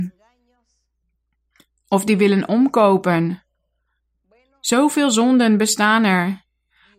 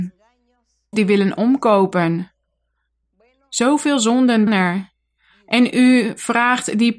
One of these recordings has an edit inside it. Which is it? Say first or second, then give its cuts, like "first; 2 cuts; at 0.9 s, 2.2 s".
second; 2 cuts; at 0.9 s, 4.5 s